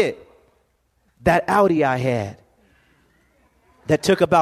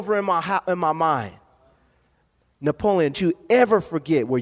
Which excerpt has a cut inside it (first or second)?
second